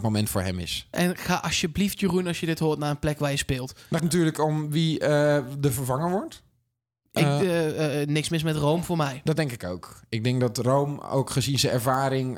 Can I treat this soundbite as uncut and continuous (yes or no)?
no